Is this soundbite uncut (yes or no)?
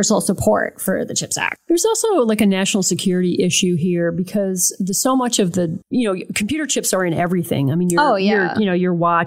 yes